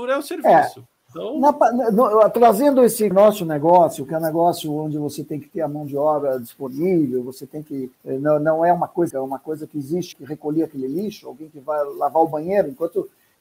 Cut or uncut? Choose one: cut